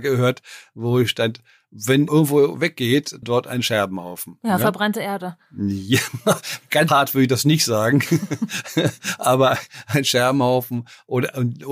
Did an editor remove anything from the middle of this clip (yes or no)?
yes